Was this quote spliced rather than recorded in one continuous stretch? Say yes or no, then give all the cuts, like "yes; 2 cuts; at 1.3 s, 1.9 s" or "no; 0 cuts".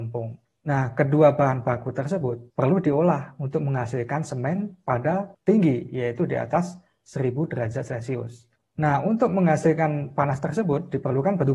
yes; 2 cuts; at 2.5 s, 5.3 s